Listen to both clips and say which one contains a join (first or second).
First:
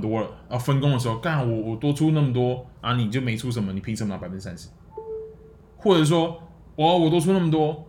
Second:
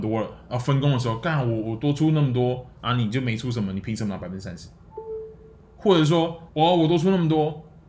second